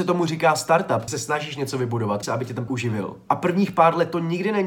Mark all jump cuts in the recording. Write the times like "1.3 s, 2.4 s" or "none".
1.1 s, 2.2 s, 2.7 s